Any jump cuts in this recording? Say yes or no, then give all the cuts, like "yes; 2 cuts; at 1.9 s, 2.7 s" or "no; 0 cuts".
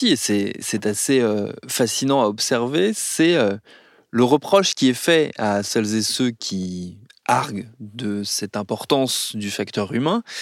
no; 0 cuts